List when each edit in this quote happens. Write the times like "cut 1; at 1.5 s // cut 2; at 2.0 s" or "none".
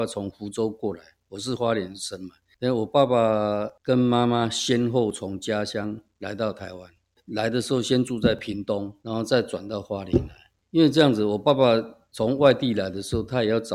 none